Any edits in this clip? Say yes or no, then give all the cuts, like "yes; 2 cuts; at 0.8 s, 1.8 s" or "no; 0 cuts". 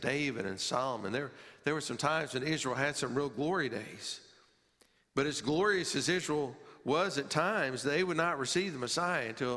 no; 0 cuts